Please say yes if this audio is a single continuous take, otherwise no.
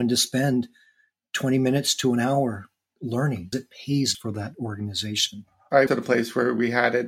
no